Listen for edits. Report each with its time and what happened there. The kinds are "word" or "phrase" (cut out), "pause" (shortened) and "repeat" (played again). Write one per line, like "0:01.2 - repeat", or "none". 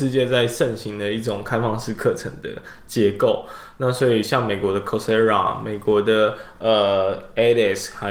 none